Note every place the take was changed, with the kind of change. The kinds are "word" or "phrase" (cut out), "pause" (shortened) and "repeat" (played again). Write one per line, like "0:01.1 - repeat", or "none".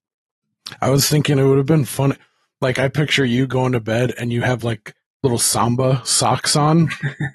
none